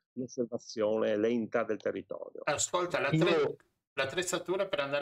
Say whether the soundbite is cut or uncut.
uncut